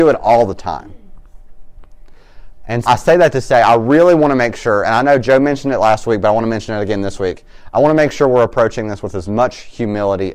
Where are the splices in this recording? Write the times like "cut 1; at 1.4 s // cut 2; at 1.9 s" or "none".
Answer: cut 1; at 2.9 s